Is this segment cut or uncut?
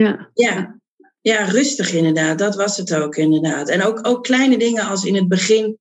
uncut